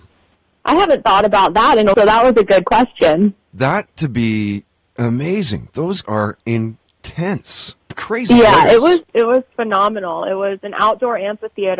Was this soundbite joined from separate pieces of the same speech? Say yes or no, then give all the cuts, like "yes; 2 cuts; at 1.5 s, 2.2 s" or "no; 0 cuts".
yes; 5 cuts; at 1.9 s, 4.0 s, 6.0 s, 7.8 s, 9.1 s